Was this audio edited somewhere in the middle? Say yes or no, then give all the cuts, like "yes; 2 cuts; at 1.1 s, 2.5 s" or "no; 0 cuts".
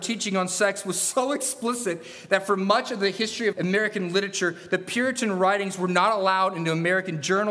yes; 1 cut; at 3.5 s